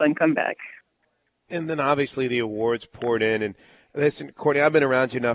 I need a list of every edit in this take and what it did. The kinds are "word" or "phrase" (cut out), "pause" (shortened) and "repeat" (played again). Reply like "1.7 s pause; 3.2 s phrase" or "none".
none